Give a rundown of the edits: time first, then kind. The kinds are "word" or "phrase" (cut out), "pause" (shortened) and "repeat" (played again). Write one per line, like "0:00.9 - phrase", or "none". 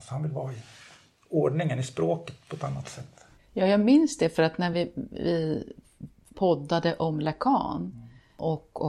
none